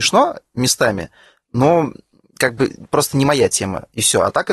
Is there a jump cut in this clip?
no; 0 cuts

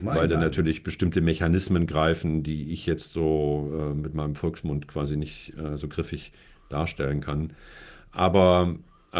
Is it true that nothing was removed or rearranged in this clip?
yes; 0 cuts

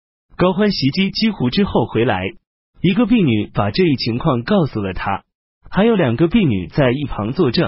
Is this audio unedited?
yes; 0 cuts

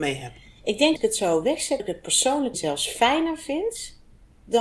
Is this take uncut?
no; 3 cuts; at 1.0 s, 1.8 s, 2.5 s

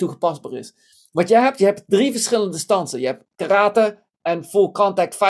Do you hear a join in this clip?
yes; 1 cut; at 3.2 s

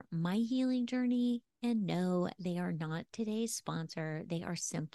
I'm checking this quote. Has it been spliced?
no; 0 cuts

